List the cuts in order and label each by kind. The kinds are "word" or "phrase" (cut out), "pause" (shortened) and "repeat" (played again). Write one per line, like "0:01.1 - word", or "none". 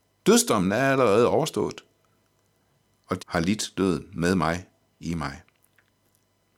0:03.2 - word

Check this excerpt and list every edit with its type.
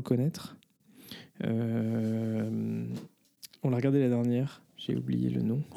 0:04.7 - pause

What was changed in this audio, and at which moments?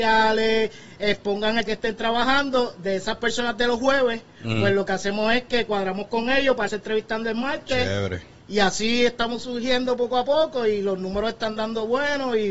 0:01.7 - word
0:06.7 - word

